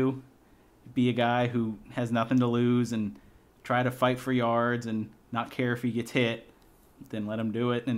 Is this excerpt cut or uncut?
uncut